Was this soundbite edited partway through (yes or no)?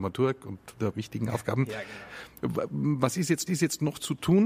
yes